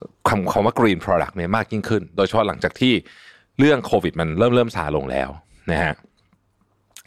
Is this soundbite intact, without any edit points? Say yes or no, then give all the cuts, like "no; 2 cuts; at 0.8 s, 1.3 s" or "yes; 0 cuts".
yes; 0 cuts